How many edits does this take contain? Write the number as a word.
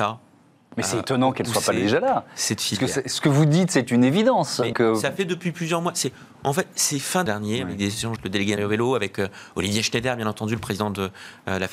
four